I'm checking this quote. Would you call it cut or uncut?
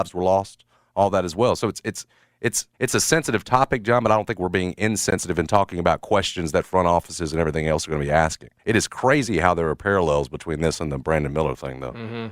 cut